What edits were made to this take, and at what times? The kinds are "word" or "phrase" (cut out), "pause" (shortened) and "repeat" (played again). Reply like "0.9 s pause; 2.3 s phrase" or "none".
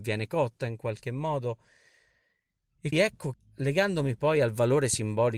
2.9 s word; 3.3 s word